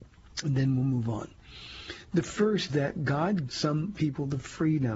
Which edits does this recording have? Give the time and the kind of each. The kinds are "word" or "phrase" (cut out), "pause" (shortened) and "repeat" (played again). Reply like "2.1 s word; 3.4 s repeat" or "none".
2.7 s word; 3.5 s word